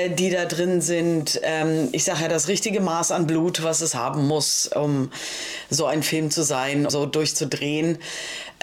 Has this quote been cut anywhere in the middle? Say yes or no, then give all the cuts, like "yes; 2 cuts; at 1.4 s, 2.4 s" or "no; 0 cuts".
yes; 1 cut; at 6.9 s